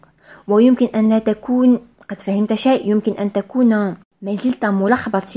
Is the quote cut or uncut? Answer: uncut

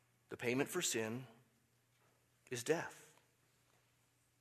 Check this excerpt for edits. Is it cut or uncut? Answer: uncut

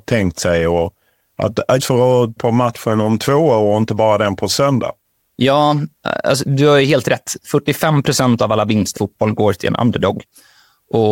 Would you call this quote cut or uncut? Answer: cut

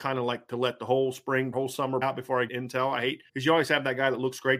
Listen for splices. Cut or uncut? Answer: cut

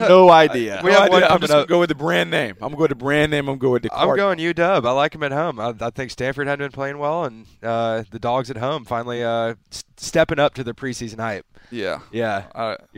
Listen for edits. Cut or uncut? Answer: uncut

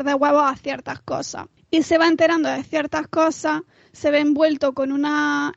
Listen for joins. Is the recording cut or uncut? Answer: uncut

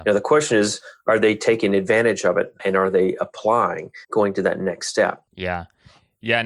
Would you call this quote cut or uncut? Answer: cut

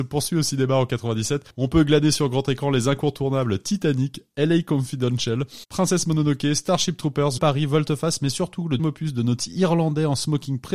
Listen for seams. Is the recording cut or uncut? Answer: cut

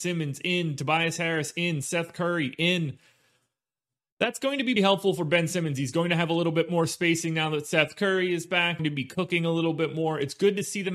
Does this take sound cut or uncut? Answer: cut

